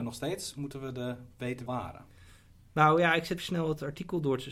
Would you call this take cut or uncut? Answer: cut